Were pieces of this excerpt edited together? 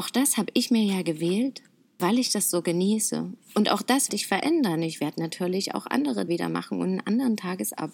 yes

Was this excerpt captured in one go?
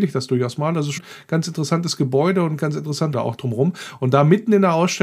no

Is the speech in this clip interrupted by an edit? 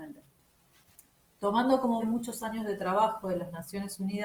yes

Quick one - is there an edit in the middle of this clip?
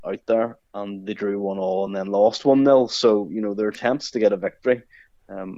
no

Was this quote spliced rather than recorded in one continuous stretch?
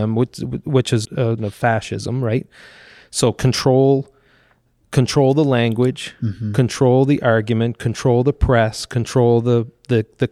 yes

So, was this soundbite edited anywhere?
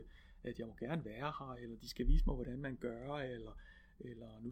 no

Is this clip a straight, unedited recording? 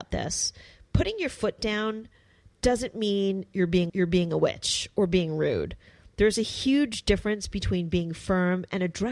no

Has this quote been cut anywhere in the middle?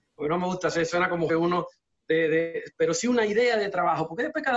yes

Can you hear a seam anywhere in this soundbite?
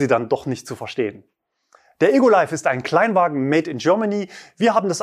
no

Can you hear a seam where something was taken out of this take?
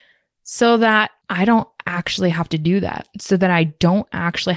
yes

